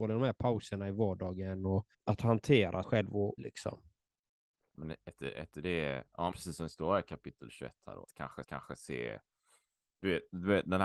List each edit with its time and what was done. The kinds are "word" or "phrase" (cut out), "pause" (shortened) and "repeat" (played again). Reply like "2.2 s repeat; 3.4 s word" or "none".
1.9 s pause; 2.8 s word; 3.4 s phrase; 6.3 s word; 8.0 s word; 8.4 s repeat